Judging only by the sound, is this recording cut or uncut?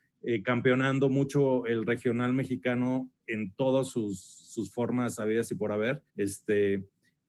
cut